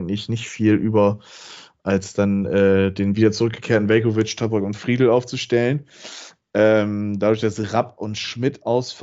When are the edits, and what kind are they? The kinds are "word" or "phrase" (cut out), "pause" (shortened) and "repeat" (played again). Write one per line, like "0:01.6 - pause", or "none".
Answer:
none